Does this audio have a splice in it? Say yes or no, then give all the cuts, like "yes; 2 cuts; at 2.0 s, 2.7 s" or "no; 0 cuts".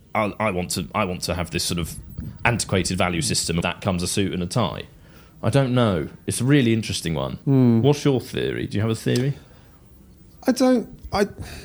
yes; 2 cuts; at 3.6 s, 7.4 s